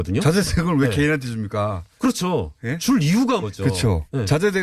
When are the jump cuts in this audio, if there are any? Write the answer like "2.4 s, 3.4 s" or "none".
3.4 s